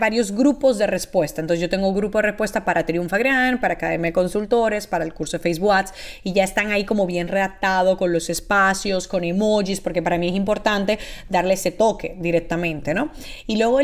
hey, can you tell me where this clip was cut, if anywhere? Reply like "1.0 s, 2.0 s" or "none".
none